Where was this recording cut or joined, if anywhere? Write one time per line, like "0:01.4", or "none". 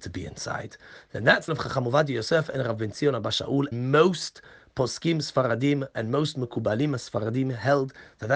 0:01.5
0:03.7